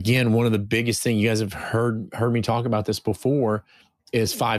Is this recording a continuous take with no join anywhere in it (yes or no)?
yes